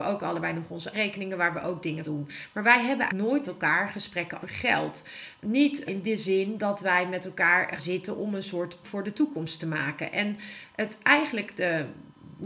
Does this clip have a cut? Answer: yes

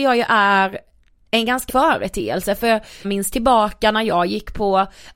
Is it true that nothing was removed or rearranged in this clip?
no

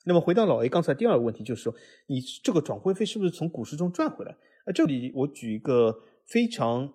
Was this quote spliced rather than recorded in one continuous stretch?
no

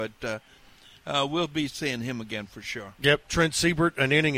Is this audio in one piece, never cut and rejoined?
yes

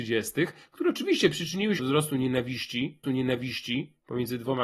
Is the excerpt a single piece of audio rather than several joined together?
no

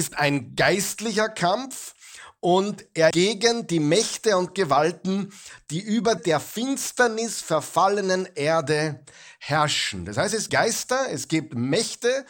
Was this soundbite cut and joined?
yes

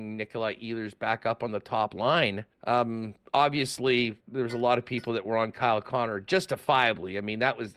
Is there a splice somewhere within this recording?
yes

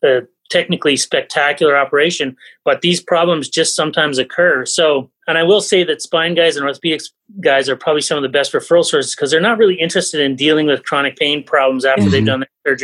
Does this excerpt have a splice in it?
no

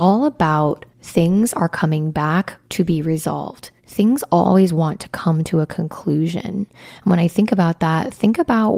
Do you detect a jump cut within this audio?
yes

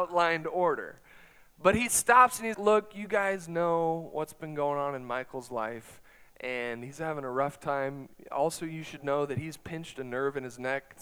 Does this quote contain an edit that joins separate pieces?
yes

